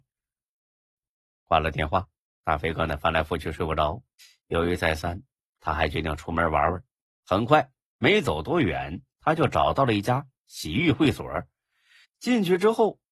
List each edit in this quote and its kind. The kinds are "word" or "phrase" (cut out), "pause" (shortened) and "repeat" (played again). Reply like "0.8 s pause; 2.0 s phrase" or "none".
4.2 s pause

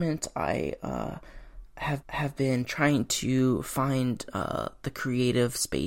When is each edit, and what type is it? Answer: 2.0 s repeat

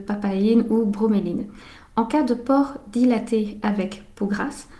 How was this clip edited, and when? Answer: none

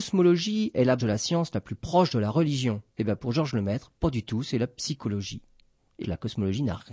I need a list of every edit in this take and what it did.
1.0 s word; 2.9 s pause; 6.0 s word

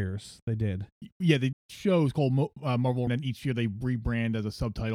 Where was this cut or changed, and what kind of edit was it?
1.5 s phrase; 3.1 s phrase

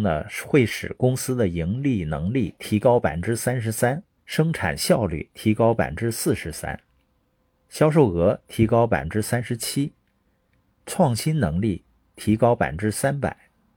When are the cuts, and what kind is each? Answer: 4.2 s pause

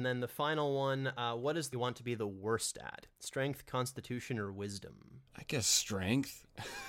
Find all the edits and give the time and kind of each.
1.7 s word; 5.3 s pause

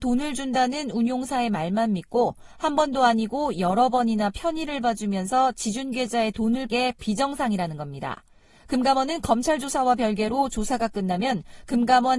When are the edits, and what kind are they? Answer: 6.7 s word

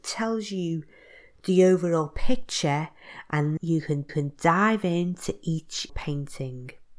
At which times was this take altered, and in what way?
3.6 s word; 4.1 s repeat; 5.9 s word

